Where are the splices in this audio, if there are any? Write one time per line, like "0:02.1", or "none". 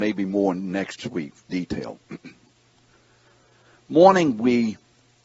0:01.0
0:01.5
0:03.9